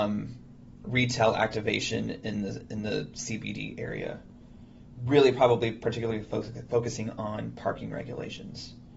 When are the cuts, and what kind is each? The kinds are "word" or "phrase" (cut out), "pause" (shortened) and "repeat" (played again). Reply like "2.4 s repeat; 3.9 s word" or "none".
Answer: none